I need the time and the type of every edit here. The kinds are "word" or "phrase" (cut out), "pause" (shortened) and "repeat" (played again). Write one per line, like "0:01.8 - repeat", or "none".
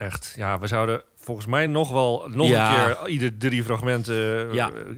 none